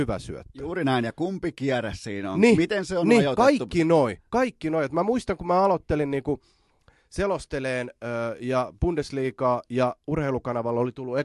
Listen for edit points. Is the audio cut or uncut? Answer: uncut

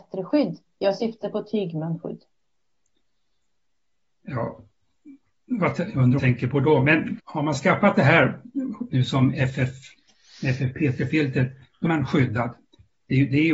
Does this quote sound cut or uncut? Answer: cut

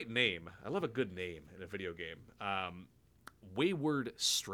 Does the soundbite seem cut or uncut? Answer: uncut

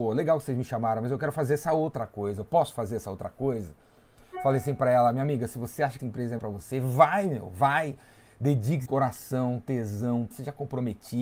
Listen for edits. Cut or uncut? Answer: cut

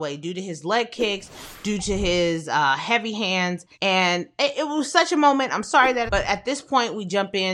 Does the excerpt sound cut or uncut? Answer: cut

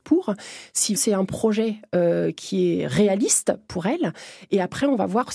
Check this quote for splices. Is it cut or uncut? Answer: cut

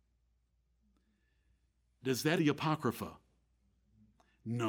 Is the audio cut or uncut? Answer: cut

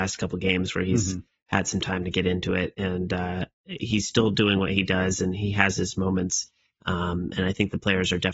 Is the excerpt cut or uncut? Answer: uncut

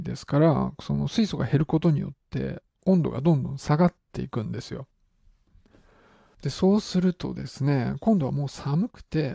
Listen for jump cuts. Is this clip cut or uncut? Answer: uncut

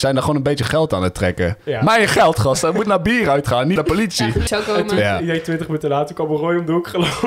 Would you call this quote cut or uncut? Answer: cut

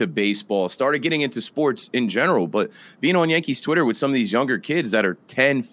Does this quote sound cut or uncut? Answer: uncut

